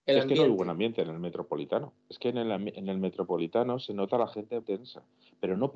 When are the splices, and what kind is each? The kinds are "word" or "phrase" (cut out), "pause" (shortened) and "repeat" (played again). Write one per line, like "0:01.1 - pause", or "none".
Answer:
0:04.6 - word